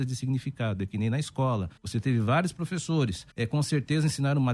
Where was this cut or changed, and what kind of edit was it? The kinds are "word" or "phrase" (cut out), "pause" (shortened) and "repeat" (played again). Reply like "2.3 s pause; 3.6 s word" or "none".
1.8 s pause; 3.3 s pause